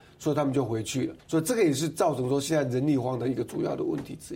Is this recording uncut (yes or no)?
no